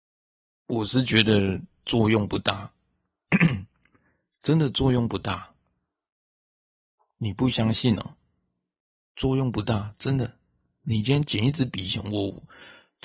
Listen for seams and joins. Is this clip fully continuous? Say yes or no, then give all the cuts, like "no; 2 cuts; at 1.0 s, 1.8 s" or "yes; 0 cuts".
yes; 0 cuts